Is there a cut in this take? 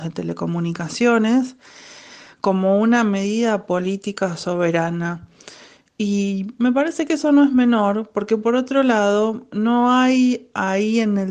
no; 0 cuts

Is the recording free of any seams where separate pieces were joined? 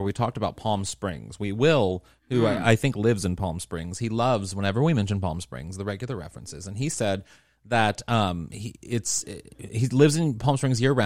yes; 0 cuts

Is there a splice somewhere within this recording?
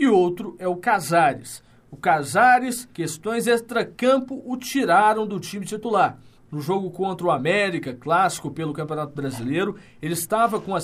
yes; 2 cuts; at 2.9 s, 6.3 s

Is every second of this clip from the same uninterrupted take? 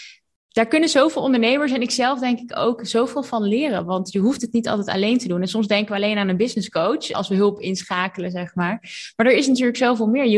no; 1 cut; at 7.1 s

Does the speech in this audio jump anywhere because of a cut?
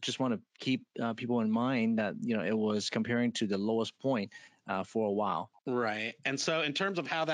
yes; 1 cut; at 5.6 s

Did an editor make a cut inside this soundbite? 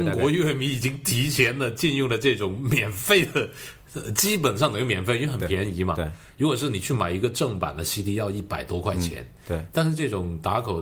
no; 0 cuts

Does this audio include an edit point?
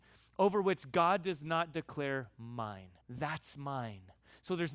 yes; 1 cut; at 3.0 s

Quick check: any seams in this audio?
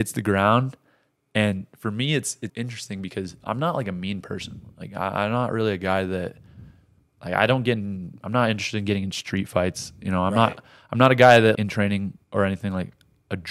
yes; 3 cuts; at 2.5 s, 11.5 s, 12.2 s

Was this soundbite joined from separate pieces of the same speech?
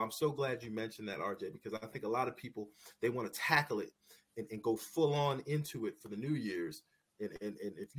no; 0 cuts

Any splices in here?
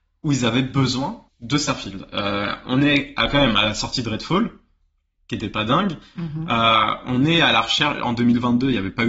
yes; 1 cut; at 1.3 s

